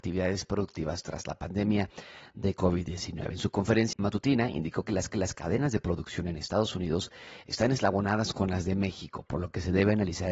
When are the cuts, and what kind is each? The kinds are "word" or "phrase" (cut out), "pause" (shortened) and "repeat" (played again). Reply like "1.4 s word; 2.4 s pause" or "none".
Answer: 3.9 s word; 5.1 s repeat